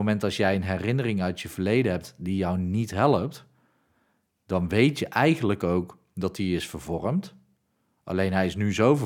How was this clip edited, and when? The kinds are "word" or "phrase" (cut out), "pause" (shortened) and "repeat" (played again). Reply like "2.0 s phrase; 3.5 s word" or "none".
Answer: none